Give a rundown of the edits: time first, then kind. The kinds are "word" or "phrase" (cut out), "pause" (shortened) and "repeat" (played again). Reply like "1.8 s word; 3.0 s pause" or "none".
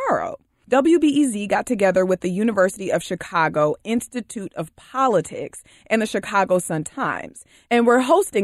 none